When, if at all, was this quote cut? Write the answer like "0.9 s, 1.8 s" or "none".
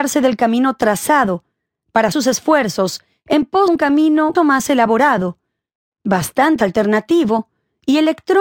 2.1 s, 3.7 s, 4.3 s, 6.6 s